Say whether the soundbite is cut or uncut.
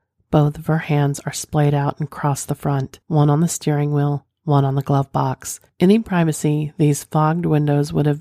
cut